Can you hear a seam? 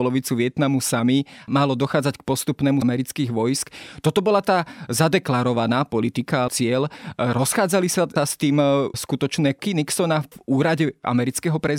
yes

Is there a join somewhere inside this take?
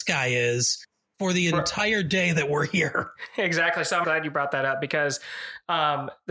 yes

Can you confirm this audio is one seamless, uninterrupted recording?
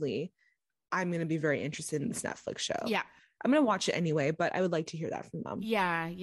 yes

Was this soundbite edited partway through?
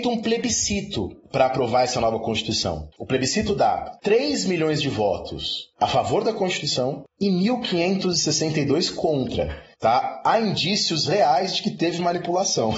no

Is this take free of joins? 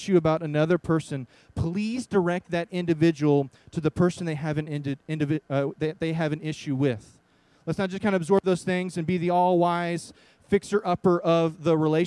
yes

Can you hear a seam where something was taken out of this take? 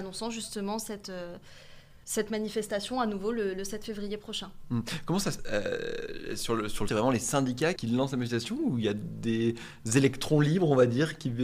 yes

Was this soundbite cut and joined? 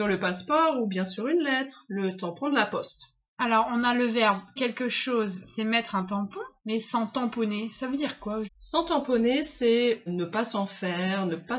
yes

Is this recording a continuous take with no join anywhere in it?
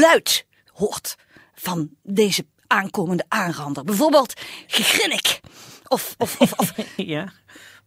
yes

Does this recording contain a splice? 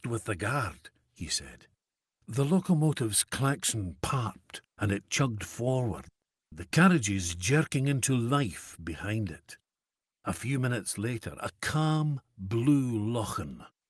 no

